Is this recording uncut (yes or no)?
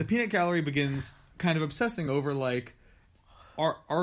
yes